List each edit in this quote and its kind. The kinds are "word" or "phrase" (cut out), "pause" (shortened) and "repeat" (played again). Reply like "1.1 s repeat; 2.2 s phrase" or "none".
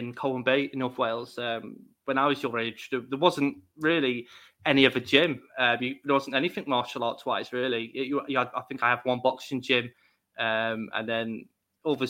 none